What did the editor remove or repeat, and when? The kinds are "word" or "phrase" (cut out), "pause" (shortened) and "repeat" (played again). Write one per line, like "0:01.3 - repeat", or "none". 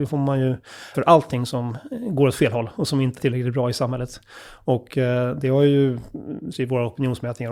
0:00.9 - word
0:03.2 - word
0:06.5 - word